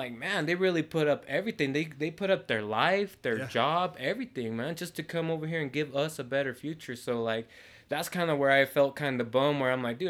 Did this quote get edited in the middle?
no; 0 cuts

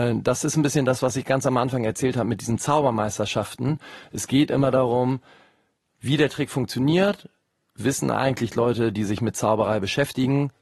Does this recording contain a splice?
no; 0 cuts

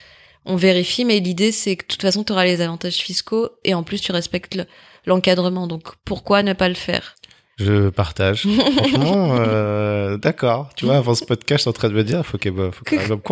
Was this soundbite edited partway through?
no; 0 cuts

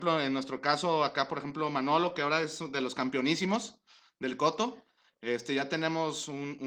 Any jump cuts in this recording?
no; 0 cuts

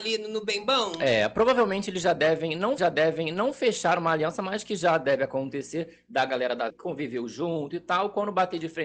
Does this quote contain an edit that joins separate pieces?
yes; 2 cuts; at 2.8 s, 6.7 s

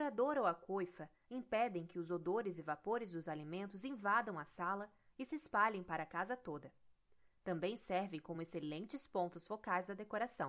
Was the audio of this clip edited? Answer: no; 0 cuts

